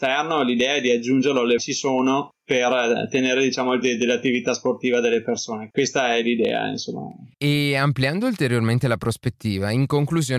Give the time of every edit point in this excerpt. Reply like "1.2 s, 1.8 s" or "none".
1.6 s, 3.8 s, 5.7 s, 7.3 s